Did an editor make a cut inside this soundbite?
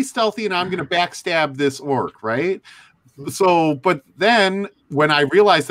no; 0 cuts

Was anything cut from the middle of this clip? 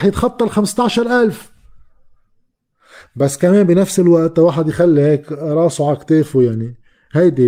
no; 0 cuts

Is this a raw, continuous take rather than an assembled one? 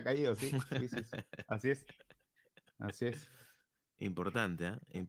yes; 0 cuts

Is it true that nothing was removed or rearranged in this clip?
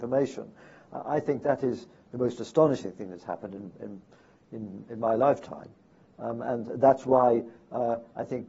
yes; 0 cuts

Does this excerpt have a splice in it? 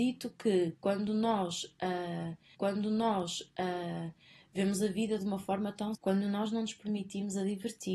yes; 2 cuts; at 2.5 s, 5.9 s

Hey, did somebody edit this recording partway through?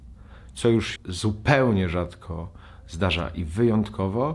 yes; 1 cut; at 1.0 s

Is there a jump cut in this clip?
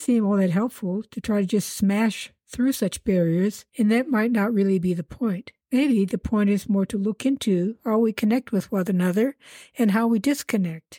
yes; 2 cuts; at 3.7 s, 5.6 s

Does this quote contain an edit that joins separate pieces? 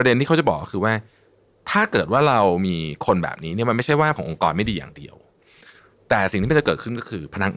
yes; 1 cut; at 4.2 s

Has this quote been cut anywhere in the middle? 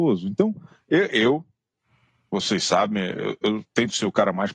no; 0 cuts

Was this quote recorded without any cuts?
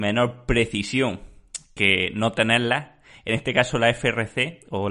yes; 0 cuts

